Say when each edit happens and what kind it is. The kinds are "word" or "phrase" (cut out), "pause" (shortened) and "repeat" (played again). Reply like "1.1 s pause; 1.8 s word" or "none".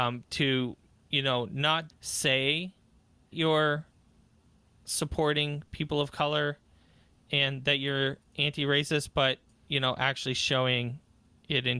1.9 s word; 3.3 s word